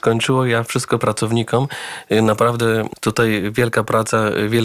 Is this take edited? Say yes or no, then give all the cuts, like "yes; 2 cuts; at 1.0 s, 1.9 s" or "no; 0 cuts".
yes; 1 cut; at 1.0 s